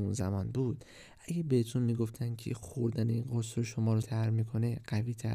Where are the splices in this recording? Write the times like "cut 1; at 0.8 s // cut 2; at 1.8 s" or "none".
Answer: cut 1; at 4.0 s